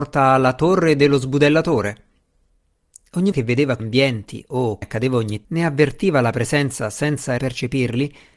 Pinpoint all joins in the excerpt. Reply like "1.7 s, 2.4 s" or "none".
3.3 s, 3.8 s, 4.8 s, 5.4 s, 7.4 s